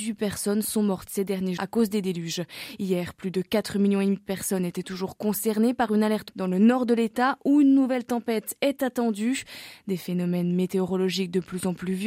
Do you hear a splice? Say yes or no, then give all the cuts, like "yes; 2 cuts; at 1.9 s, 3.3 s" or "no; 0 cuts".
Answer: yes; 2 cuts; at 1.6 s, 6.3 s